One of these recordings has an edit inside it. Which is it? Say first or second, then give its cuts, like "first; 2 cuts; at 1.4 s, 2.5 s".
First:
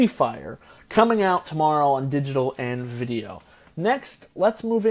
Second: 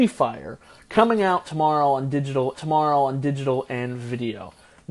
second; 1 cut; at 2.5 s